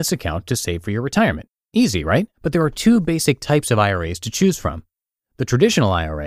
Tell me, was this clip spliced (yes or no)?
yes